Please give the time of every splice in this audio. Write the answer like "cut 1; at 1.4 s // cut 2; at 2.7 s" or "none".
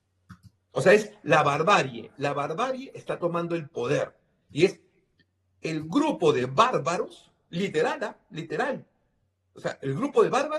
none